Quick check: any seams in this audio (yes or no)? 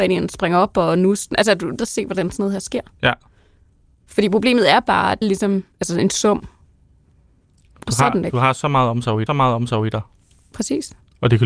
yes